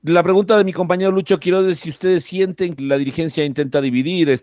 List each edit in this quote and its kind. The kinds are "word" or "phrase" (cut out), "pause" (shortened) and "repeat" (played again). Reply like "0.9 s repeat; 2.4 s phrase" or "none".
2.8 s word